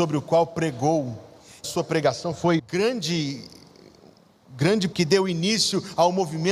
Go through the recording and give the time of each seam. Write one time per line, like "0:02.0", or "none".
0:01.6
0:02.6
0:04.9